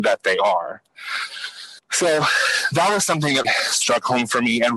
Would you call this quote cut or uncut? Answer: cut